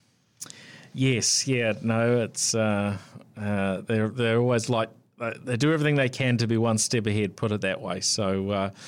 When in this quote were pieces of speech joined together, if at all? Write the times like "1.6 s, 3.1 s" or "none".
none